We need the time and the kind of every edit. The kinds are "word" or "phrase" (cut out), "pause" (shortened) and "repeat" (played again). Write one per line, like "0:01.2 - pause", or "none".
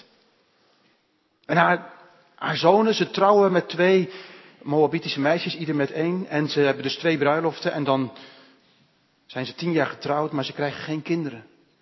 none